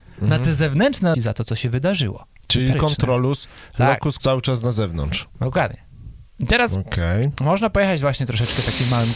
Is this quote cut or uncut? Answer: cut